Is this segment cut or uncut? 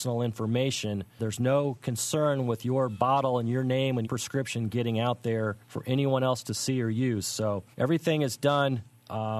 cut